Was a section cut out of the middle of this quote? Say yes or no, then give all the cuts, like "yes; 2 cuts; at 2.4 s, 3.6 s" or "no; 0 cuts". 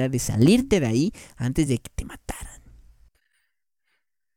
no; 0 cuts